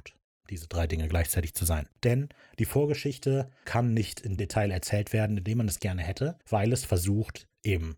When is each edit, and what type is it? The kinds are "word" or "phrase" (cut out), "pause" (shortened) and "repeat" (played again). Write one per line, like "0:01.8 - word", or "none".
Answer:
0:01.9 - pause
0:03.6 - word
0:04.4 - word
0:05.8 - word
0:06.4 - pause

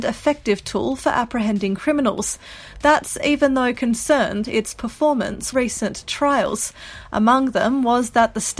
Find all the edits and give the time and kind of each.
0:04.4 - word
0:05.5 - phrase

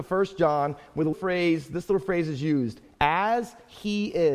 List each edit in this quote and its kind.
0:01.1 - word

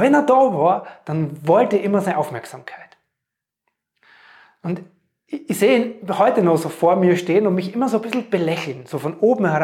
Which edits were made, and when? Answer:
none

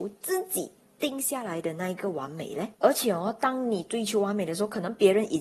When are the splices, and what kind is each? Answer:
0:02.7 - pause

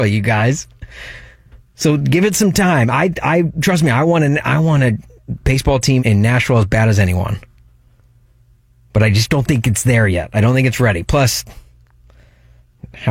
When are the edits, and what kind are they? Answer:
0:06.0 - word

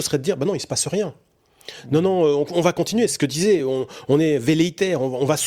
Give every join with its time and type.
none

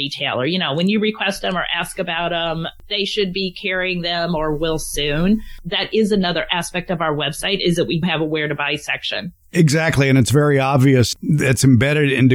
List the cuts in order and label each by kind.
0:08.0 - word

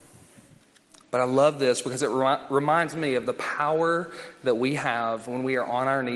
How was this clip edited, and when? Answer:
none

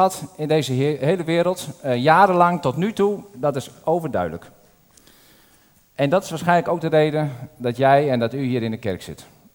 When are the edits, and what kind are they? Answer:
none

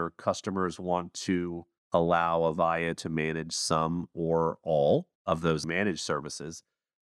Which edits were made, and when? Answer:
0:01.8 - pause
0:05.1 - pause

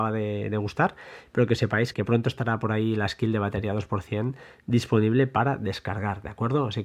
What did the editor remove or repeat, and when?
0:01.9 - word

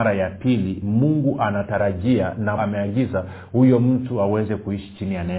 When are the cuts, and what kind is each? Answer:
0:02.6 - phrase

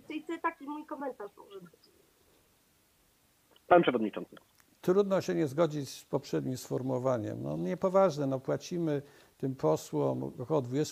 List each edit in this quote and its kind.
none

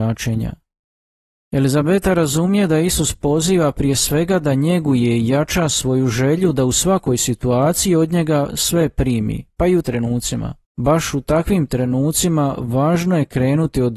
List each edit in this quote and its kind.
0:09.8 - word
0:10.6 - pause

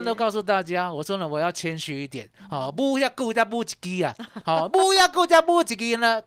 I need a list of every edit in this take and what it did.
none

